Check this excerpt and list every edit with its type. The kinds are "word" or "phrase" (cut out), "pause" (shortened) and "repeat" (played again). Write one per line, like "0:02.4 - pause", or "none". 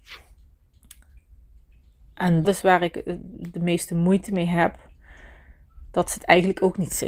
0:02.4 - word